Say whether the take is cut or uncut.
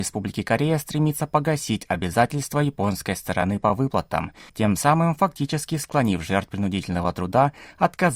cut